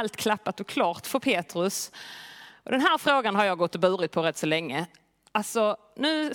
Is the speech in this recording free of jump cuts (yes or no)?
yes